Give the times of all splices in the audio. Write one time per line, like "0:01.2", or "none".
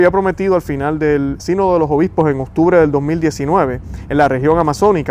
0:01.4